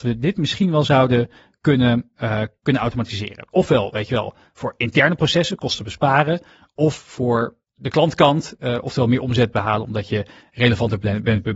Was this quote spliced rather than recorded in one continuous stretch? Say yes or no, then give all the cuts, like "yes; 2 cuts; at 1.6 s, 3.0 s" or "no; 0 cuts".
no; 0 cuts